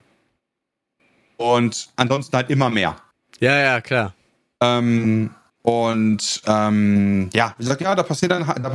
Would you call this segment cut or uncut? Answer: uncut